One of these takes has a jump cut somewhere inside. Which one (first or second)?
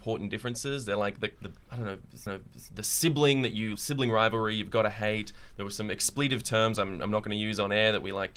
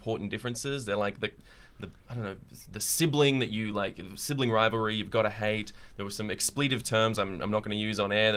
first